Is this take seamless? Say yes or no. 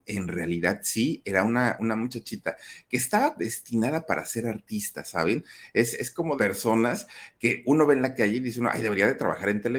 no